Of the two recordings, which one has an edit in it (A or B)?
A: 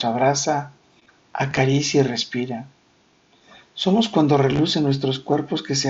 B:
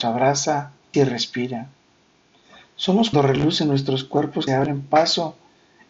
B